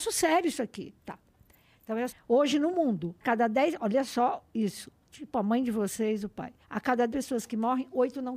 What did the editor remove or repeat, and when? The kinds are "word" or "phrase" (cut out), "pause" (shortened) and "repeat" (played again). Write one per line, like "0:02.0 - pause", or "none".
0:01.0 - pause
0:02.1 - word
0:03.2 - word
0:06.6 - pause
0:07.1 - word